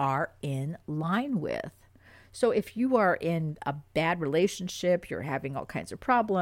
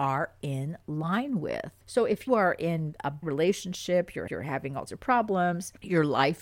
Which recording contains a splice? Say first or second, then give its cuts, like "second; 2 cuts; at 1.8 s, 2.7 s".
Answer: second; 5 cuts; at 1.8 s, 2.3 s, 3.2 s, 4.3 s, 4.9 s